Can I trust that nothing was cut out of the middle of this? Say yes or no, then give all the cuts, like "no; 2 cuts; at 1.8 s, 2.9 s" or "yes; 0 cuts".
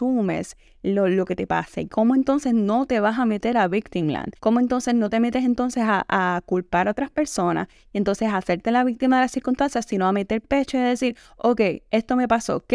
no; 1 cut; at 4.4 s